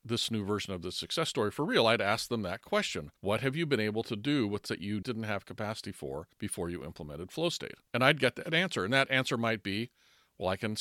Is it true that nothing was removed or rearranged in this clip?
no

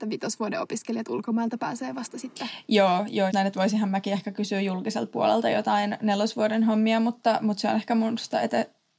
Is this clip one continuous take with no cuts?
no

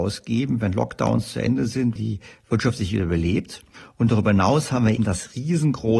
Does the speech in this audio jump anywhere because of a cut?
yes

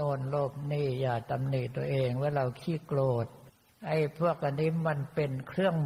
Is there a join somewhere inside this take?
yes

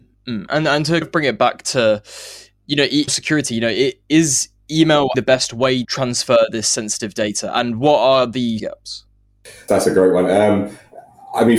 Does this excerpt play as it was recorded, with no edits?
no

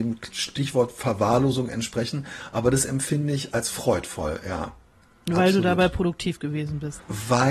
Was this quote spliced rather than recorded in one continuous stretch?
yes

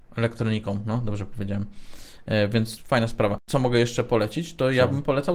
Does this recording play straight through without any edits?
no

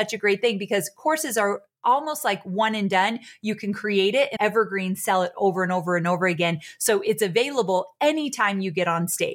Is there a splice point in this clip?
yes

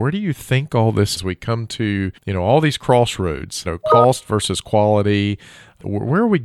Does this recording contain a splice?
yes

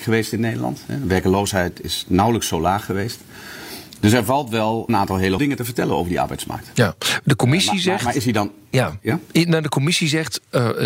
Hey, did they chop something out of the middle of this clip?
yes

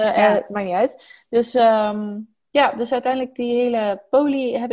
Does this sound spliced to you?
no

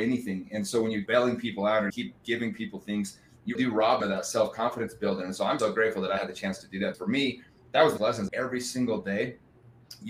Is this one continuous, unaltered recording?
no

